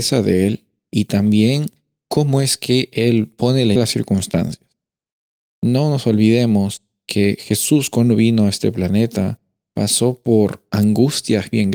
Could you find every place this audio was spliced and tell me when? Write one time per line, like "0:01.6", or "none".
0:03.8